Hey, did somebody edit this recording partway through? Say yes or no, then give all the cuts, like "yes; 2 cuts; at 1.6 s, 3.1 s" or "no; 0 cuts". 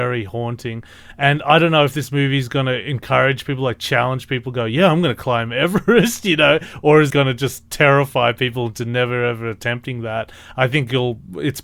yes; 1 cut; at 7.1 s